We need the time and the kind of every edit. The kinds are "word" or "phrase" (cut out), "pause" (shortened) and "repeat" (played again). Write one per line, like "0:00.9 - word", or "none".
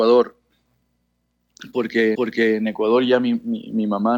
0:02.1 - repeat